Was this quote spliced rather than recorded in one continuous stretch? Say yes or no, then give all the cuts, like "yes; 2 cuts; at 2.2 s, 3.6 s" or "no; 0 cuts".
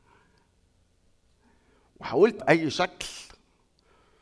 yes; 1 cut; at 2.4 s